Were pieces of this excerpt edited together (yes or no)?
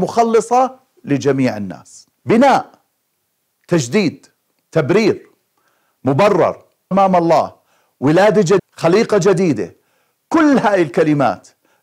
yes